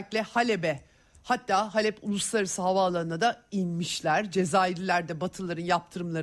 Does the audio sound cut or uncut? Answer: uncut